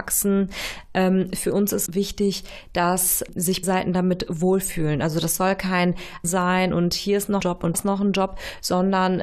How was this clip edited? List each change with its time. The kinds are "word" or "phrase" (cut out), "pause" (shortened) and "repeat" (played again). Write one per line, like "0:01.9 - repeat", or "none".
0:01.9 - word
0:03.6 - word
0:06.2 - word
0:07.4 - word
0:07.7 - word